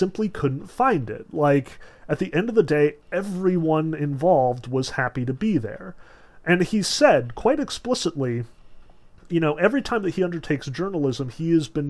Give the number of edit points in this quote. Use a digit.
0